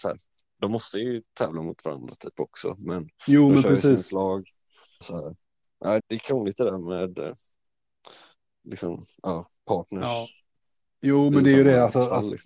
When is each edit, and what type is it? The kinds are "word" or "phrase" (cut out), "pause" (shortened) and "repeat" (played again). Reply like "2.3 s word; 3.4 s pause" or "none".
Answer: 5.0 s word; 6.0 s word